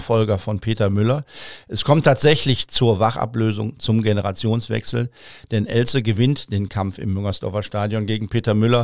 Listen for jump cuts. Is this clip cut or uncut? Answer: uncut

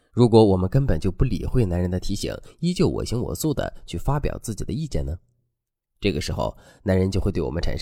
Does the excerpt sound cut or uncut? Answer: uncut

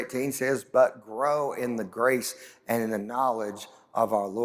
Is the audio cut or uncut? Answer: uncut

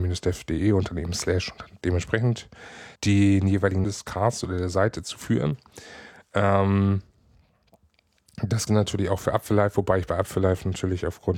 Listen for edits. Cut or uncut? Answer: cut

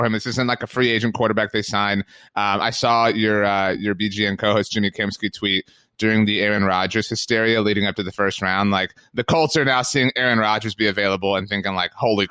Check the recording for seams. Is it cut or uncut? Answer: uncut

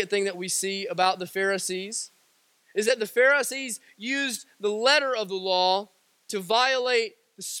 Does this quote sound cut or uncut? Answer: uncut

